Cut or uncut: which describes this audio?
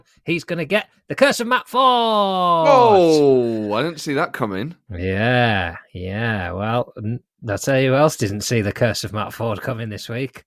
uncut